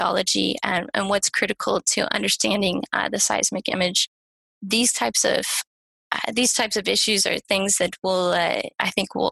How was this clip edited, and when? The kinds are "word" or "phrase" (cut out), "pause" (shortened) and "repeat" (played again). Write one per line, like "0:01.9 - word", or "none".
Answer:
none